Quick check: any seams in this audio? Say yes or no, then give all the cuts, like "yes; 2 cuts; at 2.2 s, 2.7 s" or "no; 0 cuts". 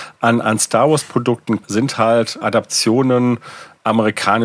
yes; 2 cuts; at 1.6 s, 2.4 s